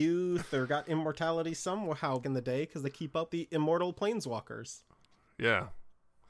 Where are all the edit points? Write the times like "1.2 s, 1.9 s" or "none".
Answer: 2.2 s, 2.8 s, 3.3 s